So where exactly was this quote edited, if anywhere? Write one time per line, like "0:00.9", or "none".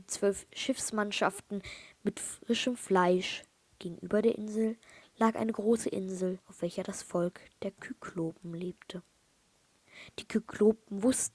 0:06.4